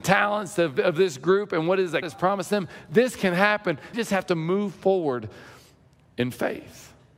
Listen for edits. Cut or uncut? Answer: cut